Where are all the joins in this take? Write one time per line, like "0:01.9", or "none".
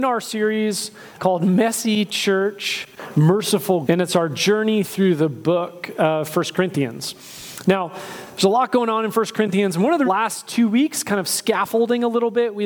0:01.2
0:03.8
0:10.0